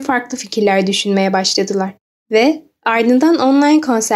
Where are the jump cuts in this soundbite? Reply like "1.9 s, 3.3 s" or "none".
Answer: 2.2 s